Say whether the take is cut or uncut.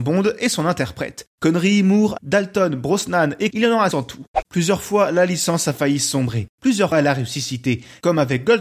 cut